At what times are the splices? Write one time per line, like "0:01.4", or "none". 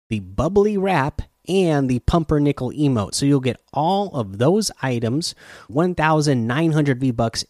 0:05.7